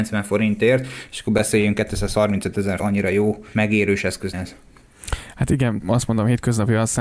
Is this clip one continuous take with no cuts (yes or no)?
no